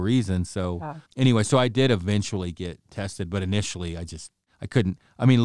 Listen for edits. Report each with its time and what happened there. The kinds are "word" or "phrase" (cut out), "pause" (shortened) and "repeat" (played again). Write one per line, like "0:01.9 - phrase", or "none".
0:01.1 - pause

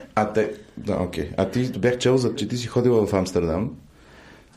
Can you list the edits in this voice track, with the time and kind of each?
0:01.7 - word
0:02.4 - word

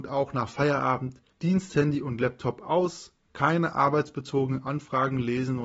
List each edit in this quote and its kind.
0:01.3 - pause

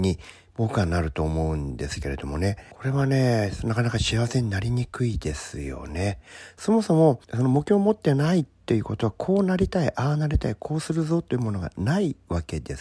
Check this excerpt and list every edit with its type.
0:02.7 - pause
0:07.2 - pause

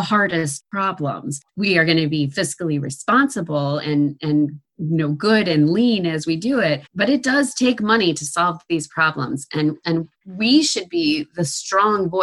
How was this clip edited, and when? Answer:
0:01.5 - pause
0:06.9 - pause
0:10.1 - pause

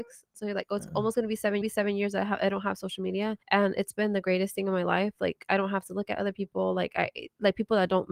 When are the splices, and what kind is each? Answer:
0:01.6 - repeat
0:03.4 - pause

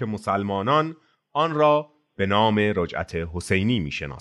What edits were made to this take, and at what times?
none

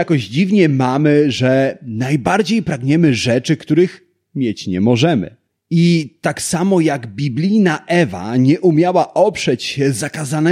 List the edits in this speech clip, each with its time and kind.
none

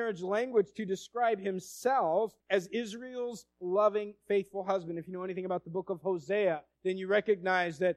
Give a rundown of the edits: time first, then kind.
0:02.4 - pause
0:06.7 - pause

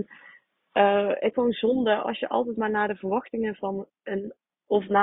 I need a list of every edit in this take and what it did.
0:01.3 - word

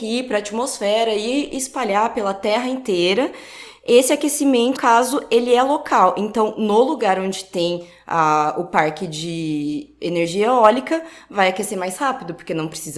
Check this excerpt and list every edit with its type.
0:04.8 - word

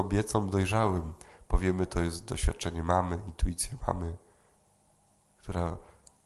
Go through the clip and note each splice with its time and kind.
none

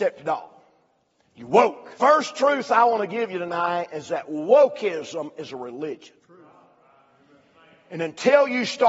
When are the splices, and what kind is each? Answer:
0:01.9 - pause
0:06.2 - pause

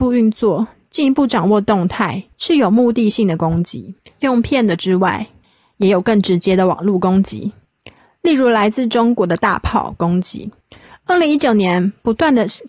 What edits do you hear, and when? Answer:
none

